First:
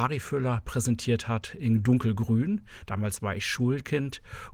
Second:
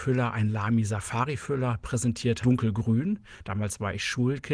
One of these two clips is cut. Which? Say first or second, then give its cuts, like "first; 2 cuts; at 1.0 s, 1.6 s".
second; 1 cut; at 2.4 s